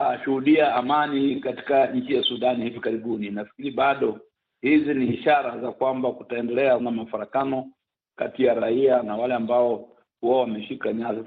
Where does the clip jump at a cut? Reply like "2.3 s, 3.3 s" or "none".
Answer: 6.8 s